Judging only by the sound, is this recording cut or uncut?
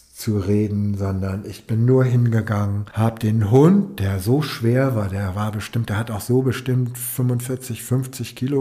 uncut